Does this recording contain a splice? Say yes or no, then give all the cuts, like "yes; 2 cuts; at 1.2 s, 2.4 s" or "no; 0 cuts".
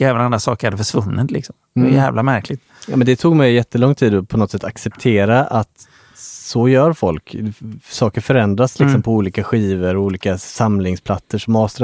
no; 0 cuts